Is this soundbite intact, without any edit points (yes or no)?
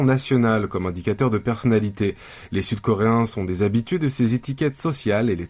yes